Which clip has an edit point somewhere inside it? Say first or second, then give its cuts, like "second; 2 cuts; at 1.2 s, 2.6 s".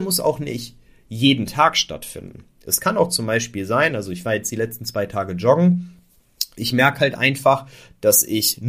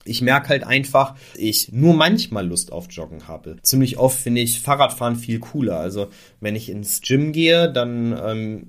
second; 2 cuts; at 1.3 s, 3.6 s